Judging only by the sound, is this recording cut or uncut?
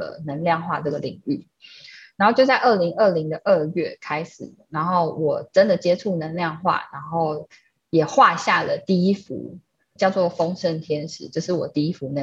cut